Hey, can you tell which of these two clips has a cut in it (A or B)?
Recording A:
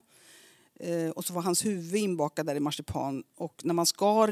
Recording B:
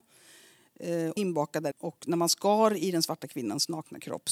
B